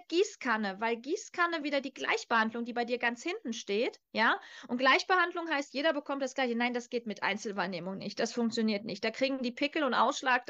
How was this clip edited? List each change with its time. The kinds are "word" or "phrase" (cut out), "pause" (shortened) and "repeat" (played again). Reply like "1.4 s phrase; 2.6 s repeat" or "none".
1.6 s word; 4.0 s pause